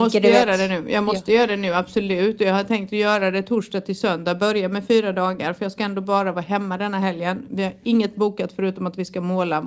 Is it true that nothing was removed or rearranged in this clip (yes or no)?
yes